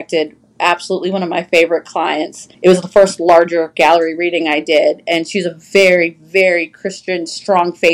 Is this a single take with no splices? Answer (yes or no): no